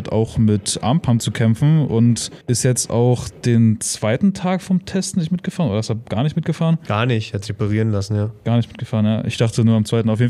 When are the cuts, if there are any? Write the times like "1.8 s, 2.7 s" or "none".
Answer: 2.4 s